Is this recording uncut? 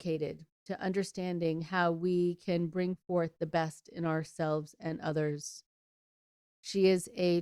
yes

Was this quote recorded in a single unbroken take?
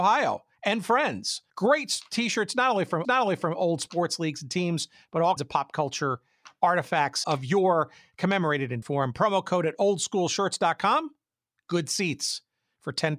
no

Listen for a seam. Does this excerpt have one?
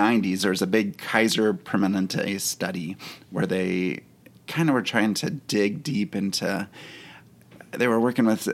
no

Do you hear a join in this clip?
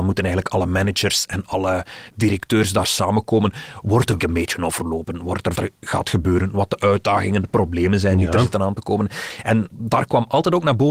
yes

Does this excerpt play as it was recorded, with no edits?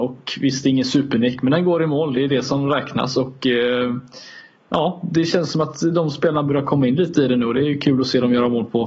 yes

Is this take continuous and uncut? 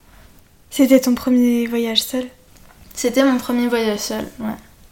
yes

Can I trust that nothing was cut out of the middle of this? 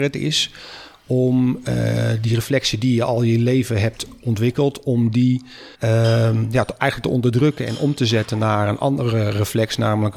no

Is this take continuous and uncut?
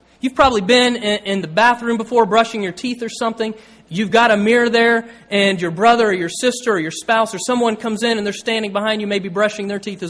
yes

